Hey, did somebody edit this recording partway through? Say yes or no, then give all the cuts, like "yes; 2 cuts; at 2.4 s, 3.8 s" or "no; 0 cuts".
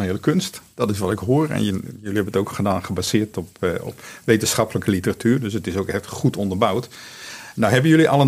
no; 0 cuts